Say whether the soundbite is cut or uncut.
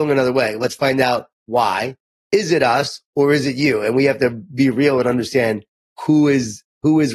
uncut